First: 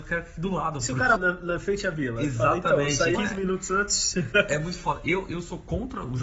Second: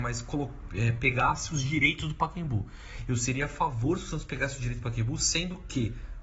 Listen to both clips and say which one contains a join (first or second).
first